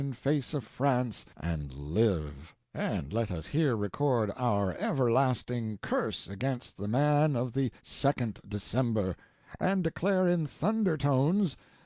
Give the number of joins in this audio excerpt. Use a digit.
3